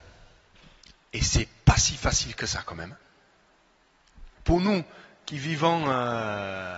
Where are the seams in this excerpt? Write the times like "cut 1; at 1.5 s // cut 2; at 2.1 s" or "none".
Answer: cut 1; at 4.3 s